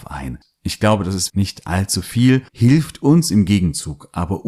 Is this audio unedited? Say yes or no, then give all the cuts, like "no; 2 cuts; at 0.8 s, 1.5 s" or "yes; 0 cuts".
no; 2 cuts; at 1.3 s, 2.5 s